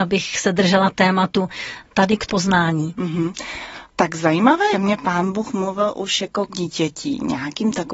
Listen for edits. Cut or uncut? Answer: cut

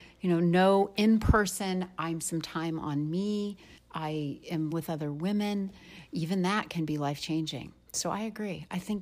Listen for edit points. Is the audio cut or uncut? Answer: cut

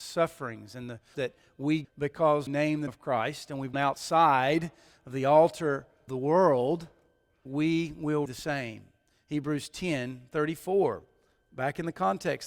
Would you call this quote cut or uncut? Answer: cut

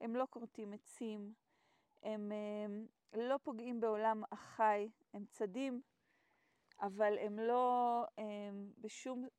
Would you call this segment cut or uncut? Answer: uncut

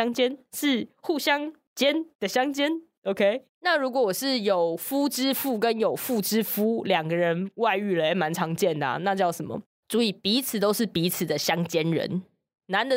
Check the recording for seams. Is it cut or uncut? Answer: cut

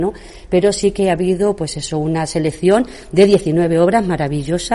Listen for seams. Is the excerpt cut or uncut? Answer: uncut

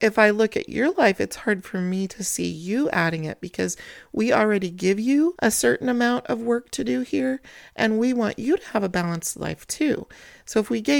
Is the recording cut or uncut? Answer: uncut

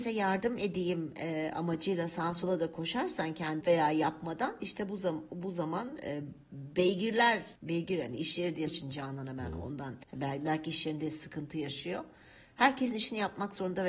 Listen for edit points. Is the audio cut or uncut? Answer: cut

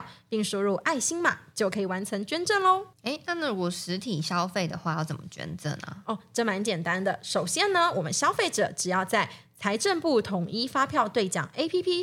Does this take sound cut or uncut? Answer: cut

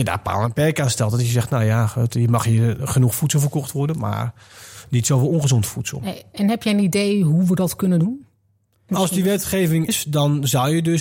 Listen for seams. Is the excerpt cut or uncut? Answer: cut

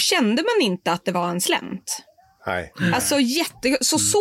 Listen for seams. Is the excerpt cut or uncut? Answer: uncut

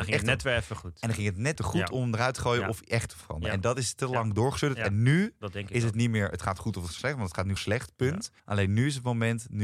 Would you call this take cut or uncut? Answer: cut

